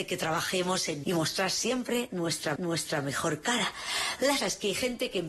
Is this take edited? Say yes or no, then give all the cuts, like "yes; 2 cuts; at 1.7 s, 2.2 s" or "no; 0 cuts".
yes; 3 cuts; at 1.0 s, 2.6 s, 4.4 s